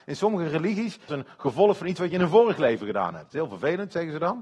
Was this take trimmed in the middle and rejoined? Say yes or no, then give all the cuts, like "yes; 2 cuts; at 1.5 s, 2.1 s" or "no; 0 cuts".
yes; 1 cut; at 1.1 s